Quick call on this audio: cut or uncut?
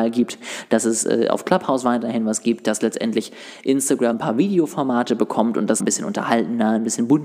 cut